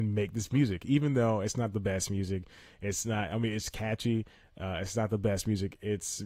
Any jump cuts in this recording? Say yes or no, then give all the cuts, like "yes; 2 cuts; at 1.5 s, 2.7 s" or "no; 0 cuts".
no; 0 cuts